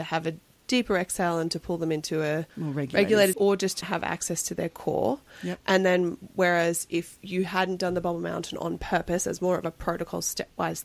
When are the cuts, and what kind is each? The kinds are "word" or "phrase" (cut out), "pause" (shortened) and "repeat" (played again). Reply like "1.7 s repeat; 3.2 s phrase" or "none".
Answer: 2.5 s pause; 3.3 s word; 3.8 s word